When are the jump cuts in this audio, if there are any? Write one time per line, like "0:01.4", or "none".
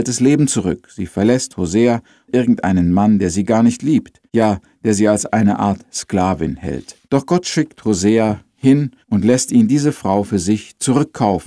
0:02.3
0:04.3
0:07.0
0:09.0